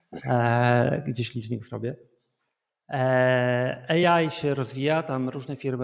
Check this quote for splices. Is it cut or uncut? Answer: uncut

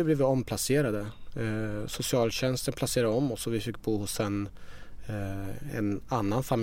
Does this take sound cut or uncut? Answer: uncut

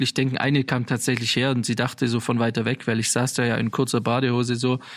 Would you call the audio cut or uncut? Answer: uncut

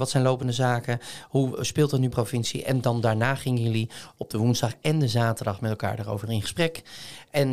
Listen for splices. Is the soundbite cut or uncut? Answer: cut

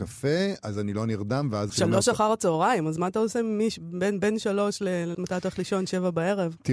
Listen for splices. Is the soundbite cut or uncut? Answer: cut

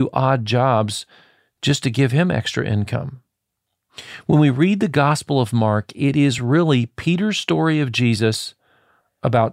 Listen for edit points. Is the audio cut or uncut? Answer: uncut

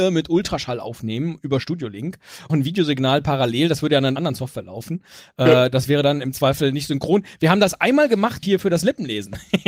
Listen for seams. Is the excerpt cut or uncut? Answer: cut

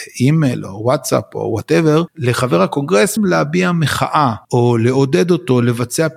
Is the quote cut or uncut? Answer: cut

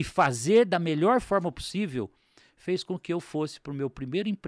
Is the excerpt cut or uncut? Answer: uncut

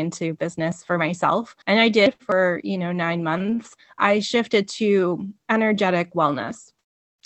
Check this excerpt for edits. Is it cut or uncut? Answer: cut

